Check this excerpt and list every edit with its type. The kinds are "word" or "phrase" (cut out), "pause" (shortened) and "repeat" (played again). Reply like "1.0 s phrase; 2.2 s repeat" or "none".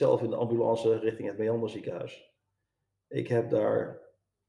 none